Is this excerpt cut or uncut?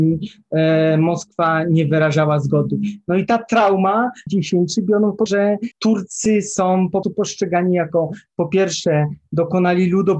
cut